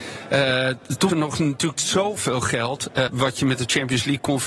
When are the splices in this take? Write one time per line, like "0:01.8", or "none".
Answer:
0:01.1
0:01.7
0:03.1